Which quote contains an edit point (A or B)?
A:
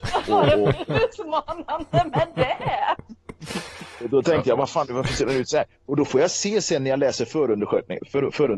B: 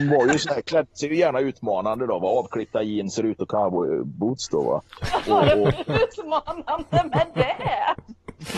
B